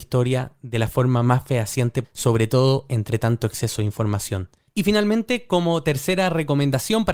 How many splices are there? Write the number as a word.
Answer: one